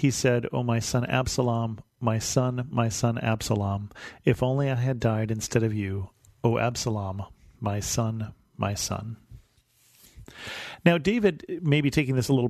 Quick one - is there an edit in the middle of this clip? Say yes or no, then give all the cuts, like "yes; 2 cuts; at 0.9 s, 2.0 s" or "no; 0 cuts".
no; 0 cuts